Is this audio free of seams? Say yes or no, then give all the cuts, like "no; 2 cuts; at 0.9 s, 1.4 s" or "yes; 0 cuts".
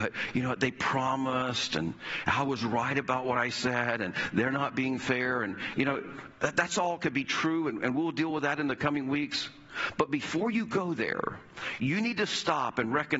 yes; 0 cuts